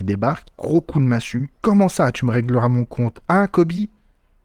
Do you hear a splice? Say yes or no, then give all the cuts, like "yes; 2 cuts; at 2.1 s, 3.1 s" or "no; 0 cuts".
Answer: yes; 1 cut; at 1.5 s